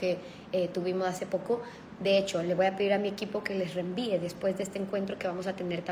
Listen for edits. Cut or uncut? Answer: uncut